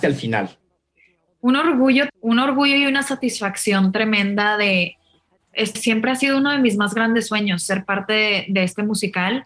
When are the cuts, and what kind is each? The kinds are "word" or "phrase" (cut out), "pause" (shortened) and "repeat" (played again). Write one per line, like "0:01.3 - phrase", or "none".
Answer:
0:02.1 - word
0:05.8 - word